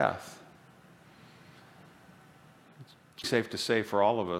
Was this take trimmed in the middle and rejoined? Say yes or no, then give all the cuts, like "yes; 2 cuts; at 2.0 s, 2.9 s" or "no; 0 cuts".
yes; 1 cut; at 3.2 s